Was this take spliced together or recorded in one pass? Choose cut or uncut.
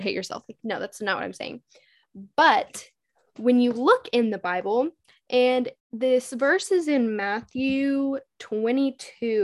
cut